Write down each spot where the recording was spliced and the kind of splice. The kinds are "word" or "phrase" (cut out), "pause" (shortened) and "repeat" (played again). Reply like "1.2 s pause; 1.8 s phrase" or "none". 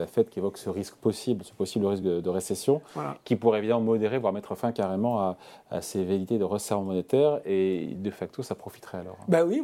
none